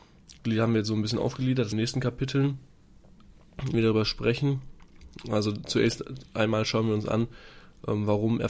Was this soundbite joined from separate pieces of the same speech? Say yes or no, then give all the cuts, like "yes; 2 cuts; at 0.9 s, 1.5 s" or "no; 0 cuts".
yes; 2 cuts; at 1.7 s, 3.7 s